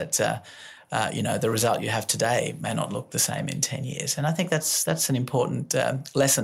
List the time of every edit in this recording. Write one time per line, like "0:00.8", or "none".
none